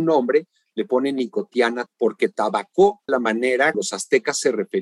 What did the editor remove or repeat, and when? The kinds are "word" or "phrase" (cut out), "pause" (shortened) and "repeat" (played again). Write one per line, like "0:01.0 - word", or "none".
0:01.9 - word
0:03.1 - word
0:03.7 - word